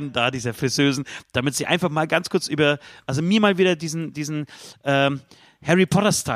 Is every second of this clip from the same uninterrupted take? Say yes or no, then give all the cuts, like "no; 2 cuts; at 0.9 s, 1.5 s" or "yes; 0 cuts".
yes; 0 cuts